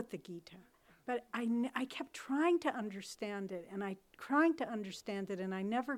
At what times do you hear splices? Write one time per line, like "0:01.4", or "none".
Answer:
none

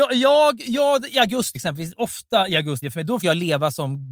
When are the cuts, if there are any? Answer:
0:01.5
0:02.8
0:03.2

